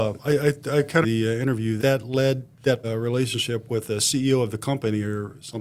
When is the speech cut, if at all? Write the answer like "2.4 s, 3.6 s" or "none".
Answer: 1.0 s, 1.8 s, 2.8 s